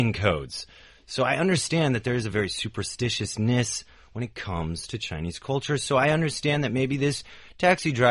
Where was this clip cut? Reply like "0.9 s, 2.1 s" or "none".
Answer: none